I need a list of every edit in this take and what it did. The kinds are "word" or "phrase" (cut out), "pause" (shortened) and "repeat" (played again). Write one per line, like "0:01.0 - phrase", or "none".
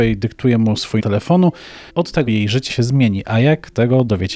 0:01.0 - word
0:01.9 - pause
0:02.3 - word
0:02.7 - word